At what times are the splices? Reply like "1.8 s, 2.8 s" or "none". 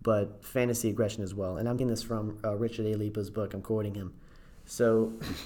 1.8 s